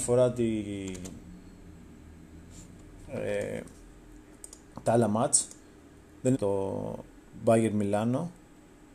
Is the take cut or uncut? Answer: cut